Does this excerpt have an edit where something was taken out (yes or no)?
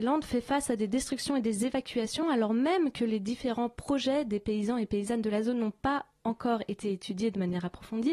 no